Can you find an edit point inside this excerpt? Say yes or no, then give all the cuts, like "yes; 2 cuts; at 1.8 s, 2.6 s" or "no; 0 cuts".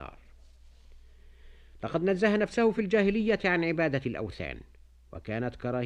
no; 0 cuts